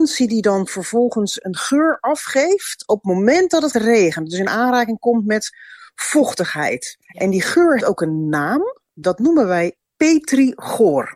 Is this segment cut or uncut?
cut